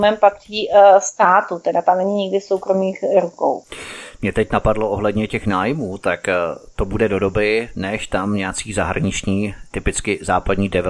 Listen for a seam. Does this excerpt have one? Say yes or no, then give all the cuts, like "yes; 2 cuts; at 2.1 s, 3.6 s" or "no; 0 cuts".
no; 0 cuts